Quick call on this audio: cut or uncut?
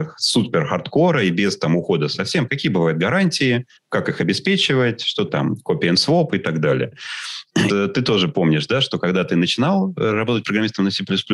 cut